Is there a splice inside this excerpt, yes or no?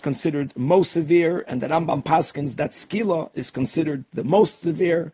no